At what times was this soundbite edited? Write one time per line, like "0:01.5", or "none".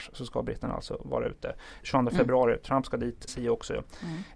0:01.8
0:03.3